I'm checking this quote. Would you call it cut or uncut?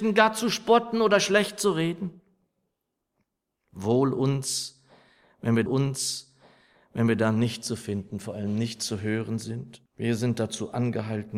cut